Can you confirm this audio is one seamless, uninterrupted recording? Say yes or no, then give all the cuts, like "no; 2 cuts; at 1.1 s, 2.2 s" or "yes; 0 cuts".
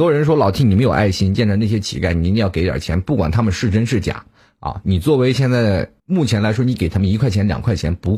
no; 1 cut; at 6.0 s